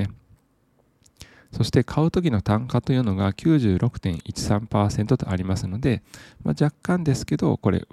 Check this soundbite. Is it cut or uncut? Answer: uncut